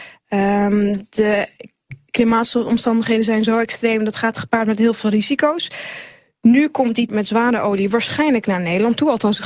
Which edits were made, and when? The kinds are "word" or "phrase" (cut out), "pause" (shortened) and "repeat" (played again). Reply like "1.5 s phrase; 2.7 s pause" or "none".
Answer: 7.1 s word